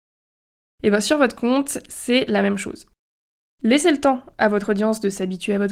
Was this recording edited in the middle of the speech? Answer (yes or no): no